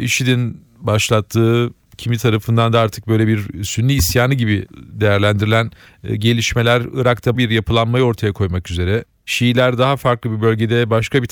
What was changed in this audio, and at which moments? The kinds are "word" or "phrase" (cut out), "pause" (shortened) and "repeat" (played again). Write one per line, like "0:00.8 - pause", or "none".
0:07.3 - phrase

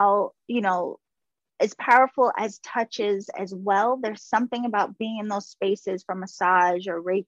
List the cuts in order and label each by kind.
none

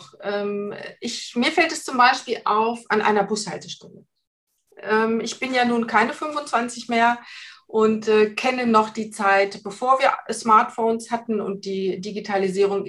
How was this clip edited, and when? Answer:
none

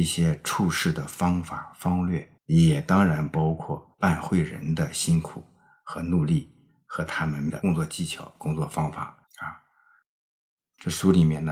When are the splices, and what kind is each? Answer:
0:02.4 - pause
0:03.9 - pause
0:09.3 - pause

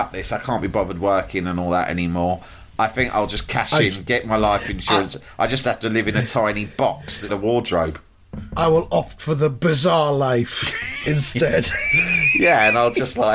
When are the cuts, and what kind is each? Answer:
0:07.3 - phrase

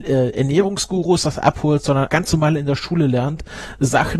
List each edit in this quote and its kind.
0:02.1 - word

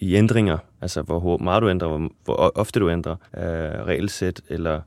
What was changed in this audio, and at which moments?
0:03.3 - pause

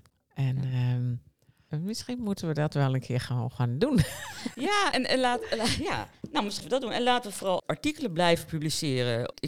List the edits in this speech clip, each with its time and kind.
0:04.9 - word
0:06.6 - word
0:07.6 - word

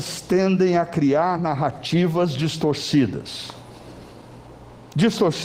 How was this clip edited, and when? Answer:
none

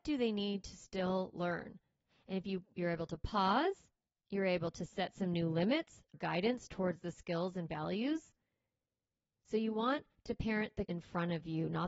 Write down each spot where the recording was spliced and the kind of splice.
0:06.1 - word
0:10.8 - word

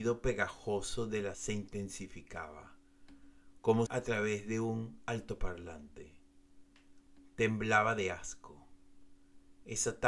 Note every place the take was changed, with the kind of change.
0:01.3 - word
0:03.9 - phrase

